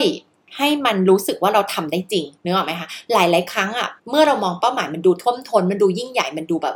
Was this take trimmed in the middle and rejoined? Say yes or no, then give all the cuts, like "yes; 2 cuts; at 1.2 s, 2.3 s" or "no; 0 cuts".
yes; 2 cuts; at 2.4 s, 4.0 s